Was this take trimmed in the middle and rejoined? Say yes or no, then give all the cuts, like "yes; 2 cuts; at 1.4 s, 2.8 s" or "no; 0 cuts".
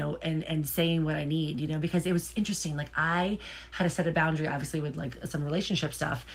no; 0 cuts